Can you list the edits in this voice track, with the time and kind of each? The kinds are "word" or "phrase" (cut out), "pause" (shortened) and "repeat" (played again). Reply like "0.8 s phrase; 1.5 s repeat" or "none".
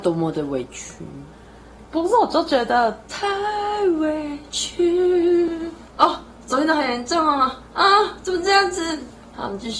1.9 s pause